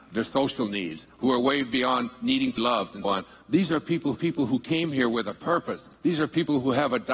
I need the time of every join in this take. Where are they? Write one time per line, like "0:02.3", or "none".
0:02.6
0:03.0
0:04.1
0:06.0